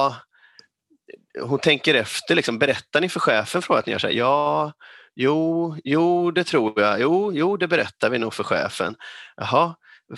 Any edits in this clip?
no; 0 cuts

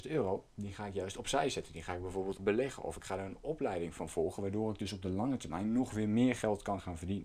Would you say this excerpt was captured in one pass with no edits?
no; 1 cut; at 2.4 s

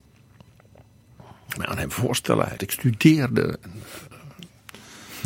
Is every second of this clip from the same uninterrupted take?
no; 2 cuts; at 1.6 s, 2.6 s

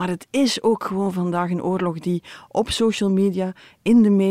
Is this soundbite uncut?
yes; 0 cuts

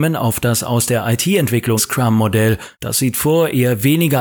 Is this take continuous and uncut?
no; 2 cuts; at 1.8 s, 2.7 s

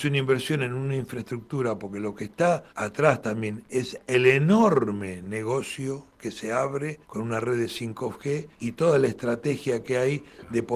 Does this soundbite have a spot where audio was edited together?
yes; 4 cuts; at 2.7 s, 6.1 s, 7.0 s, 8.5 s

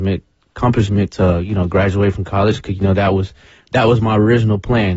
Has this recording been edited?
no; 0 cuts

